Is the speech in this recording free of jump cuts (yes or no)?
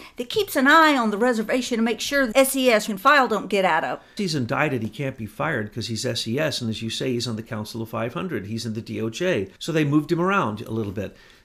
no